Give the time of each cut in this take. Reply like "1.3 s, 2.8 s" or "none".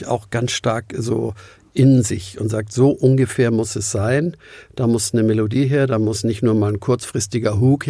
none

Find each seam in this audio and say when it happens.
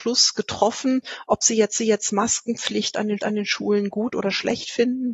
1.8 s, 3.2 s

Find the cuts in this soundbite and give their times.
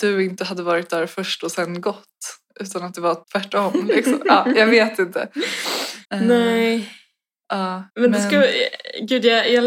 3.2 s, 6.0 s, 7.9 s

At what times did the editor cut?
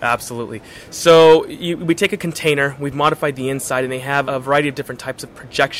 4.2 s

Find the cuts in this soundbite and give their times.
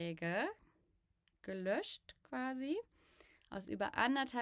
none

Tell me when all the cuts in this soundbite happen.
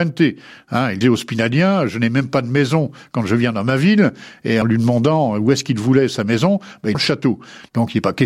1.0 s, 4.6 s, 6.9 s

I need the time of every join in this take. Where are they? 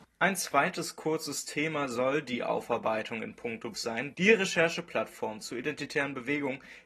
3.7 s, 4.1 s

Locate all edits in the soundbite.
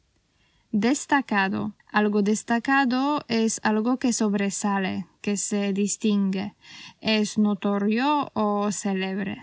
1.8 s

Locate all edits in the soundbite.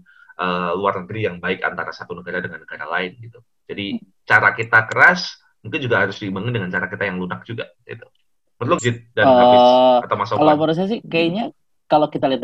8.8 s

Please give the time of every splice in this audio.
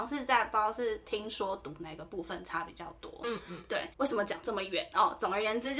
3.9 s

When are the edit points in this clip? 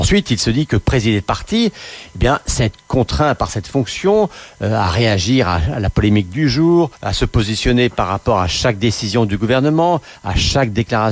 6.9 s

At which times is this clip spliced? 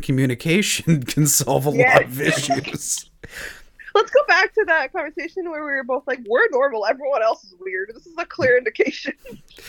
none

